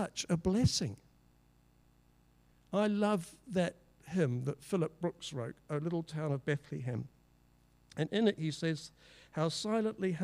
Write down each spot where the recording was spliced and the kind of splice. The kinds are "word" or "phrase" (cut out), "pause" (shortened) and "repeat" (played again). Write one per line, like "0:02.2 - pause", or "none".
none